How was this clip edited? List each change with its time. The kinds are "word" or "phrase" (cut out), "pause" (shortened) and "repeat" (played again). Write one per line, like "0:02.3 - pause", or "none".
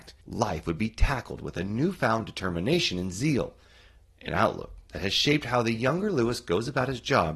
none